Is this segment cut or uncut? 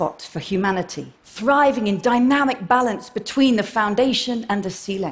cut